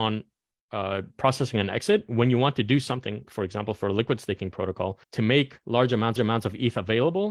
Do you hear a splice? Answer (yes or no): yes